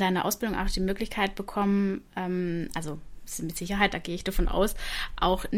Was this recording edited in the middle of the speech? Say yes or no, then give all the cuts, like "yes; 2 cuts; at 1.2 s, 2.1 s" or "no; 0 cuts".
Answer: no; 0 cuts